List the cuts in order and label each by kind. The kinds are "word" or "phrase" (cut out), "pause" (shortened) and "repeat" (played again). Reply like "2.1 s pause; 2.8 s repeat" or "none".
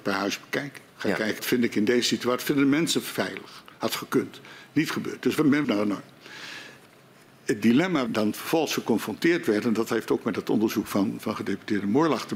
0.9 s pause; 1.4 s word; 3.7 s pause; 5.6 s phrase; 6.9 s pause; 8.1 s phrase